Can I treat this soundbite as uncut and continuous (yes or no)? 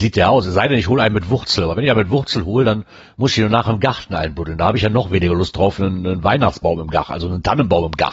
yes